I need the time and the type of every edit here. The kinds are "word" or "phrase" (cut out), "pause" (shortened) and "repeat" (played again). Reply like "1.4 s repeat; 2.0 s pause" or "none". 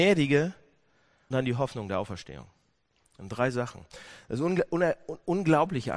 1.3 s word